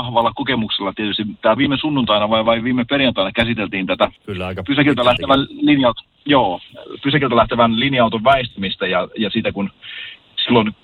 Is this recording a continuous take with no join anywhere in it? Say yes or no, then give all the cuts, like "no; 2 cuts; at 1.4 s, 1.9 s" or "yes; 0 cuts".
no; 2 cuts; at 1.6 s, 4.2 s